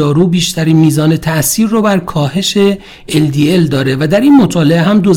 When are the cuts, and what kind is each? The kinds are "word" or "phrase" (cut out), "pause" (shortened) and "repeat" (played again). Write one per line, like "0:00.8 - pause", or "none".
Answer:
none